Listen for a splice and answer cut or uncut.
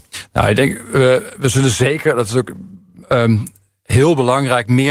uncut